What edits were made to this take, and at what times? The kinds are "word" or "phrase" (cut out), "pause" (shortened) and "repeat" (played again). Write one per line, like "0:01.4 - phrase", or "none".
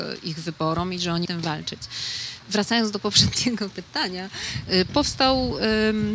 0:01.3 - phrase
0:02.4 - pause
0:04.9 - word